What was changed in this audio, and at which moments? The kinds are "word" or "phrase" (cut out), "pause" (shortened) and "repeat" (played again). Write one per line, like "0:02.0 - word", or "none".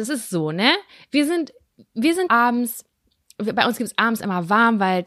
0:02.3 - phrase